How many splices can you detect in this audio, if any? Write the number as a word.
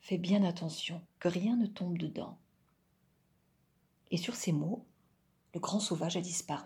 one